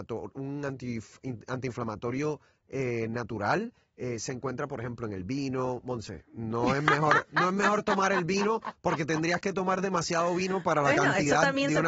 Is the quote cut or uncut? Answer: uncut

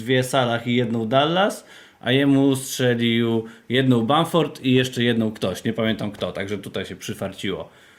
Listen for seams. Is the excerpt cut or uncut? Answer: uncut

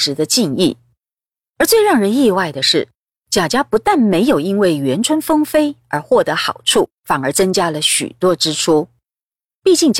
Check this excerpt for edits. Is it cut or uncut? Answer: cut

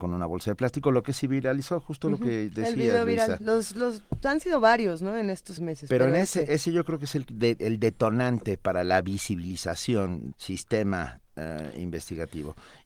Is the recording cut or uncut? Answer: cut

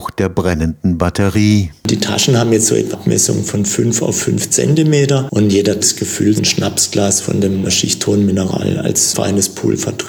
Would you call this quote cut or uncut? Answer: cut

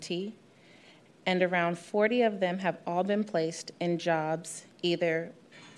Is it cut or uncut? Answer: cut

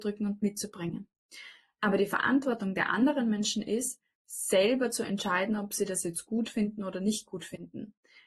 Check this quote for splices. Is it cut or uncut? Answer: uncut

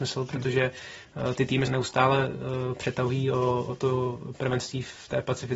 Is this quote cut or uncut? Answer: cut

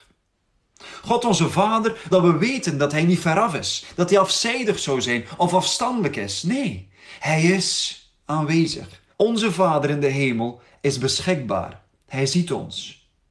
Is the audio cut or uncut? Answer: cut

